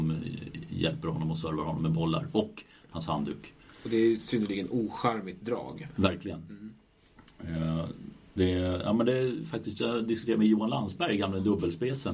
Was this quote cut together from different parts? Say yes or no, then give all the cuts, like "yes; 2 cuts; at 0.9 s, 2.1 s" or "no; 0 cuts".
no; 0 cuts